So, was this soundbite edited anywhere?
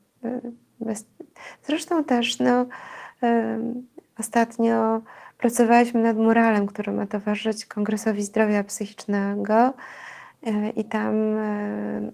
no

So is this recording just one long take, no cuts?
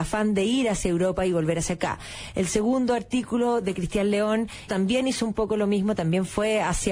no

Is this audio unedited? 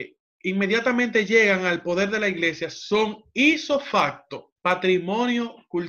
no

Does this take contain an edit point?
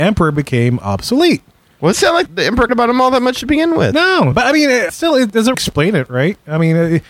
yes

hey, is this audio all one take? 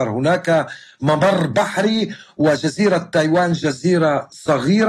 yes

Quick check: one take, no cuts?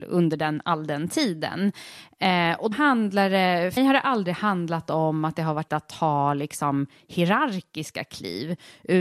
no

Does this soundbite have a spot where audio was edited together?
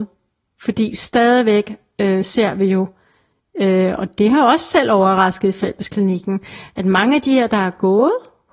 no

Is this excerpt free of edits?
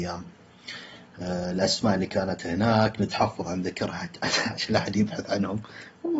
yes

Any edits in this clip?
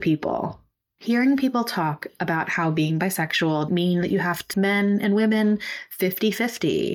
yes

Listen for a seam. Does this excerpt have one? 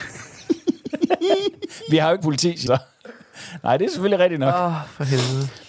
yes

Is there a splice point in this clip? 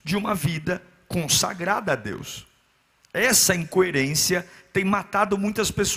no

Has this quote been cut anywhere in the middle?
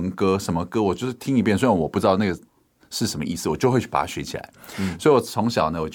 no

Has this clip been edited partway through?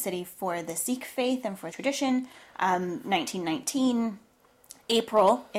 yes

